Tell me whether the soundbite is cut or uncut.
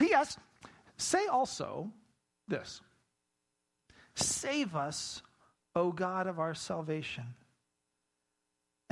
uncut